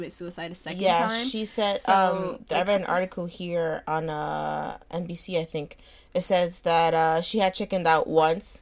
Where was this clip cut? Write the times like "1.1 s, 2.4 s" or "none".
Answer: none